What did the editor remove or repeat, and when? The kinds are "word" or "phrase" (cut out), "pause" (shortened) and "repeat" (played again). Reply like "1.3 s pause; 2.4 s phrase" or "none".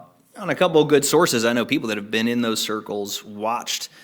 none